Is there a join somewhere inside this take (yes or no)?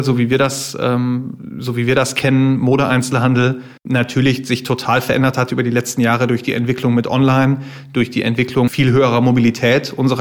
yes